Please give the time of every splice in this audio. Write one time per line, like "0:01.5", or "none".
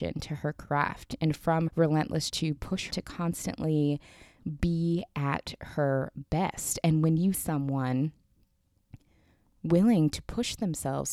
0:01.7
0:02.3
0:02.9
0:07.3